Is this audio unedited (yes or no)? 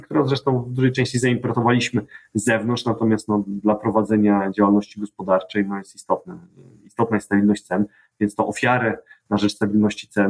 yes